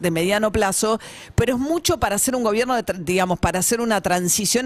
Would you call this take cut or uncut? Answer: uncut